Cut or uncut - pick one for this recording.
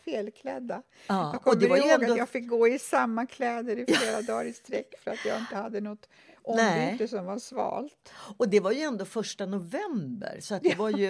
uncut